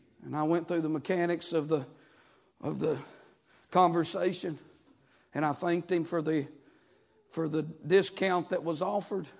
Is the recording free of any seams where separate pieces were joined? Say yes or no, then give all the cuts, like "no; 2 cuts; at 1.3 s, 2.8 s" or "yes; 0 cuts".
yes; 0 cuts